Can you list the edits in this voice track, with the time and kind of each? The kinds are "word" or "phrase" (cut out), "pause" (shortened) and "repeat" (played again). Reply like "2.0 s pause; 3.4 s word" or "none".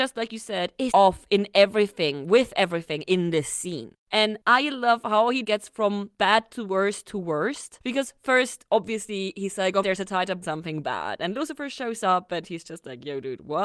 0.9 s word; 5.4 s word; 9.8 s phrase; 10.4 s phrase